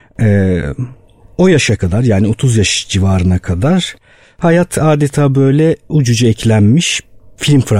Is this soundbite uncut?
yes; 0 cuts

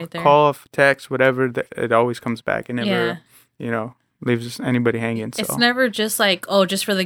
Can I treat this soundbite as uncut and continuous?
yes; 0 cuts

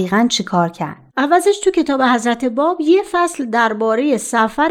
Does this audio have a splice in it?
yes; 1 cut; at 1.1 s

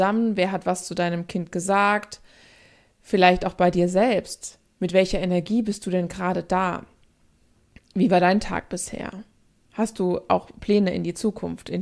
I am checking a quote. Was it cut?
no; 0 cuts

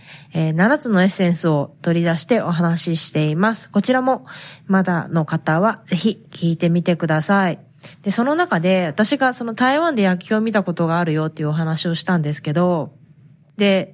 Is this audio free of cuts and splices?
no; 1 cut; at 7.9 s

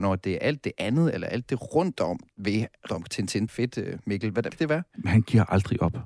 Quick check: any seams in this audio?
yes; 3 cuts; at 2.9 s, 3.5 s, 4.5 s

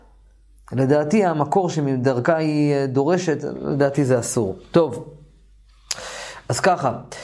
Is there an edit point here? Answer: no; 0 cuts

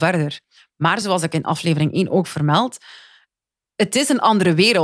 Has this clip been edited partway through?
no; 0 cuts

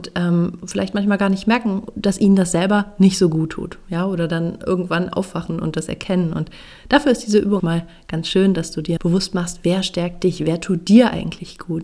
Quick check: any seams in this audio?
yes; 2 cuts; at 7.6 s, 9.0 s

